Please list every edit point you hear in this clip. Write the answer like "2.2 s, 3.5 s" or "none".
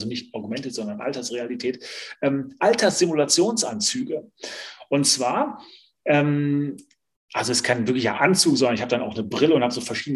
none